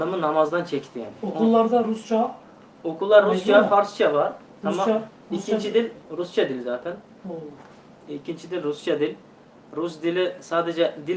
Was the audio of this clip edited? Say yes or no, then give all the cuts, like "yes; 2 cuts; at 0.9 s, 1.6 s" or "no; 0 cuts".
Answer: no; 0 cuts